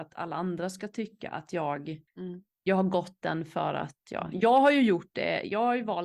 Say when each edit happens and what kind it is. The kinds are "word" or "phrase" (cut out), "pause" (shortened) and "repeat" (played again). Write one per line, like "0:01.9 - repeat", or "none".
0:02.1 - pause